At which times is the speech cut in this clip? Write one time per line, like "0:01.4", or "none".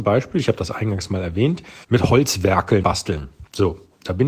0:01.8
0:02.8